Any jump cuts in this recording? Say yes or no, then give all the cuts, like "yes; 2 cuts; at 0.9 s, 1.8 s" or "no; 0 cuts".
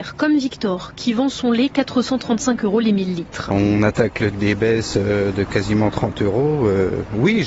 yes; 1 cut; at 4.3 s